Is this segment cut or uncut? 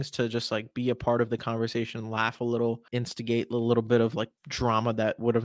cut